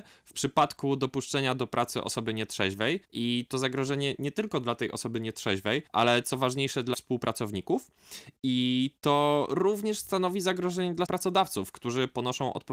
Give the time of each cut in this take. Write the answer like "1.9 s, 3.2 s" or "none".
3.0 s, 5.9 s, 6.9 s, 11.0 s

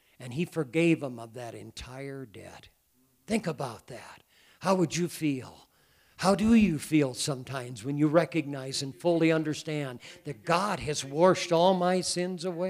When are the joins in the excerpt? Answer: none

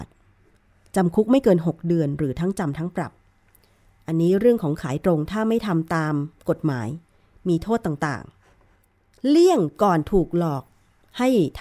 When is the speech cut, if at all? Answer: none

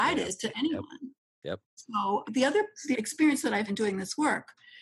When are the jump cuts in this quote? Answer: 2.2 s, 2.9 s, 3.7 s

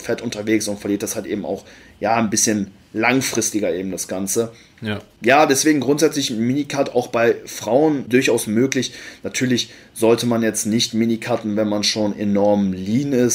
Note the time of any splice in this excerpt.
none

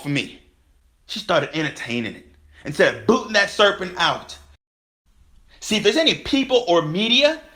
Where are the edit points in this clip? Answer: none

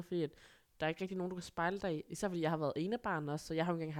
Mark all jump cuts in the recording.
none

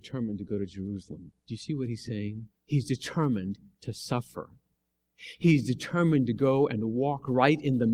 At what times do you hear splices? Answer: 1.4 s, 2.6 s

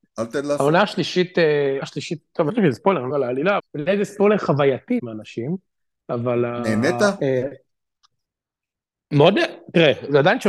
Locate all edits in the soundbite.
1.8 s, 2.5 s, 3.1 s, 3.6 s, 5.0 s

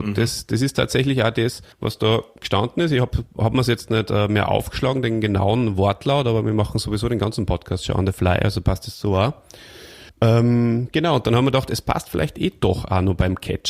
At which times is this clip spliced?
1.7 s, 10.1 s

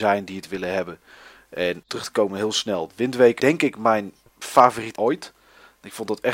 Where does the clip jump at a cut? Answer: 1.9 s, 3.4 s, 4.9 s

